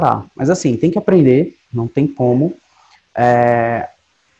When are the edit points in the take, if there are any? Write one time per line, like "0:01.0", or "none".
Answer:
none